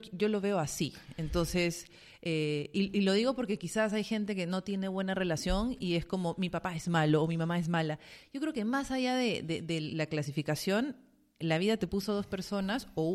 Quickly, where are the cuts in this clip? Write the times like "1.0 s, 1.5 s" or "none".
none